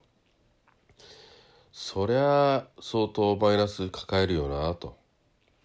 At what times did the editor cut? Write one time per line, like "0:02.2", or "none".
0:02.7